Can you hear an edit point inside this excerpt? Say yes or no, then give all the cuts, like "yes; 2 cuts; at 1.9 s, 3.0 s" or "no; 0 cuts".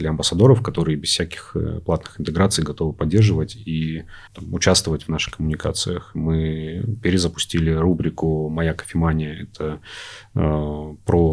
yes; 1 cut; at 4.3 s